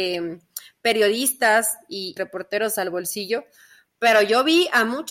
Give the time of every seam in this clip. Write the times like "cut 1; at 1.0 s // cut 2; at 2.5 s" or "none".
cut 1; at 2.2 s